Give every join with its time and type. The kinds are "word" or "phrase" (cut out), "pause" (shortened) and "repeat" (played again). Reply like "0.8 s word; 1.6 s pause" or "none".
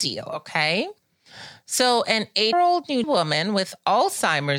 2.5 s word; 3.0 s word